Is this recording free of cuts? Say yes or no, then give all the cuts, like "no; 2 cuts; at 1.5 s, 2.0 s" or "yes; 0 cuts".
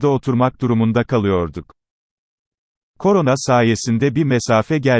yes; 0 cuts